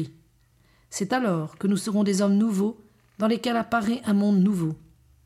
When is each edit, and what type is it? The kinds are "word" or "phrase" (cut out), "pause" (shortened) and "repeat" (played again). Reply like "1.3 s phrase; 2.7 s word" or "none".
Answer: none